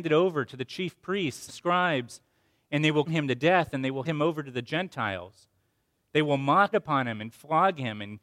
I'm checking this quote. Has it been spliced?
yes; 4 cuts; at 1.5 s, 3.1 s, 4.0 s, 6.7 s

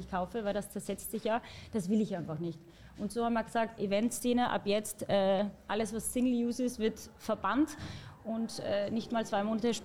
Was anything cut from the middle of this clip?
yes; 1 cut; at 3.8 s

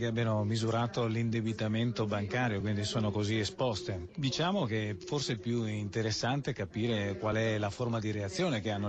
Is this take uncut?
yes; 0 cuts

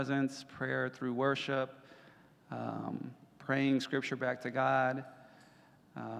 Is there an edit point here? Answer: no; 0 cuts

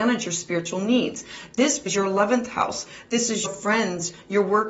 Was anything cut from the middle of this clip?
yes; 2 cuts; at 1.9 s, 3.4 s

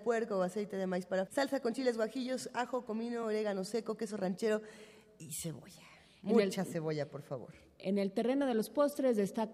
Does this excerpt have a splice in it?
yes; 1 cut; at 1.3 s

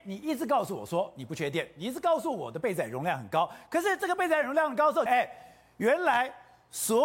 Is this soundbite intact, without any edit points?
no; 1 cut; at 5.1 s

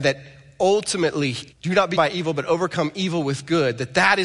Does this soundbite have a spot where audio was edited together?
yes; 2 cuts; at 1.5 s, 2.0 s

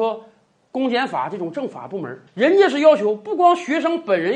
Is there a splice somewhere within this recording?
yes; 1 cut; at 2.3 s

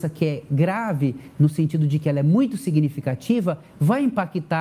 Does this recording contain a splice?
no; 0 cuts

